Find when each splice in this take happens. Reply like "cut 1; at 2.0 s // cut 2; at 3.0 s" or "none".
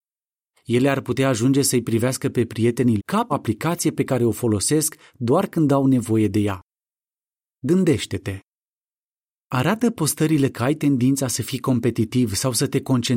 cut 1; at 3.0 s // cut 2; at 3.3 s // cut 3; at 10.5 s